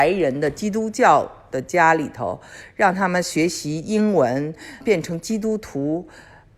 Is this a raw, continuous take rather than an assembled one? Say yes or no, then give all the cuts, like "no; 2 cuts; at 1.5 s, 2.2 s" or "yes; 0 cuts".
no; 1 cut; at 4.8 s